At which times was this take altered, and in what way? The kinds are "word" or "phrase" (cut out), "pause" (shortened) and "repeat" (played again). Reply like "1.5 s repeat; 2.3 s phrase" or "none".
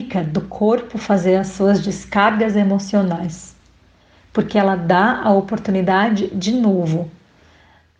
none

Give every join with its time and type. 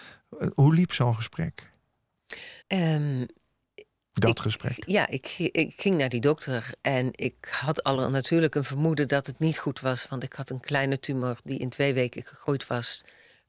2.6 s pause

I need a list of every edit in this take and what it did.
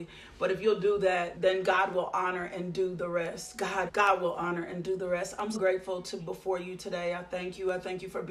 1.3 s word; 3.9 s word; 5.5 s word; 6.2 s word

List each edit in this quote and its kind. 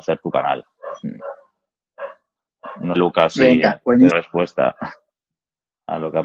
2.9 s word; 4.1 s word

